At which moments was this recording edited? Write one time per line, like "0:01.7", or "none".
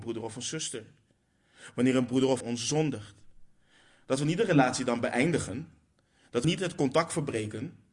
0:02.4
0:06.4